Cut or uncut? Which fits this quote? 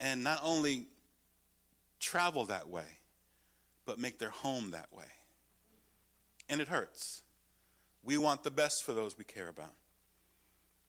uncut